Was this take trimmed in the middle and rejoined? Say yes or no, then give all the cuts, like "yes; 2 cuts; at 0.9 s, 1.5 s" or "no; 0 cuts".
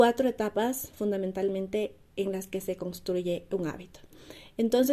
no; 0 cuts